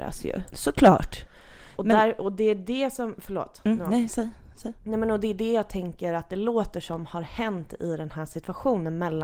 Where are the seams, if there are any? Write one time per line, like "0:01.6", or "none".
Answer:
0:01.7

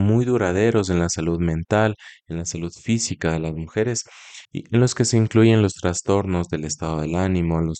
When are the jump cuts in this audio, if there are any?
0:04.4

